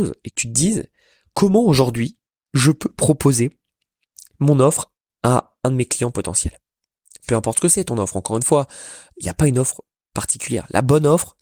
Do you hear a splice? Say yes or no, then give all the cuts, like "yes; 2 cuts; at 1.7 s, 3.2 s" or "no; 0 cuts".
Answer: no; 0 cuts